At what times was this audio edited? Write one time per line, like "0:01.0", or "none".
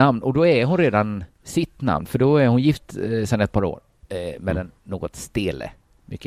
none